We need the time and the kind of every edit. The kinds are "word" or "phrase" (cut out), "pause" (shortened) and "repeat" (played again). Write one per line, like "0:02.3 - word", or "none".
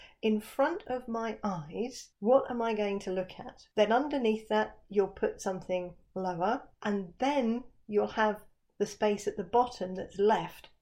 0:02.1 - pause
0:03.7 - pause
0:06.7 - pause